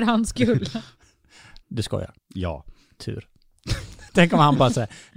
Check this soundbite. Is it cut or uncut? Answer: cut